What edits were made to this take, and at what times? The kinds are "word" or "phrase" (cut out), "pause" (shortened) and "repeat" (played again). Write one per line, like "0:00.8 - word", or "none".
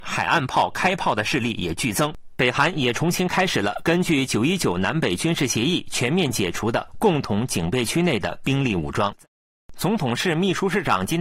0:09.3 - pause